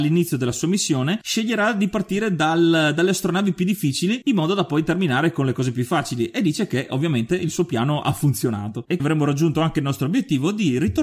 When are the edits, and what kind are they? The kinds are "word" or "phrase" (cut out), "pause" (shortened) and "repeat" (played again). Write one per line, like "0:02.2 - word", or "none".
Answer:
0:09.0 - word